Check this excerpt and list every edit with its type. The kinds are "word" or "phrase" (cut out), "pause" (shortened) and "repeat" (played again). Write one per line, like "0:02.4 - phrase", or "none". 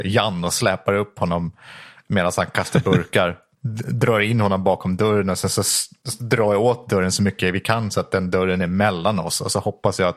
none